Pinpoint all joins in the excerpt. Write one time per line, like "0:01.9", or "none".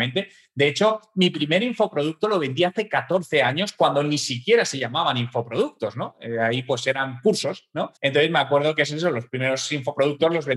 0:08.0